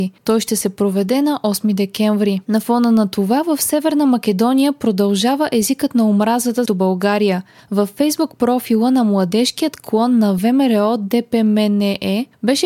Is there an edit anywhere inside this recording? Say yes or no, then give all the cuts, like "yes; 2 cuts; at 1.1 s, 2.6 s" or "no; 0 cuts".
yes; 1 cut; at 6.7 s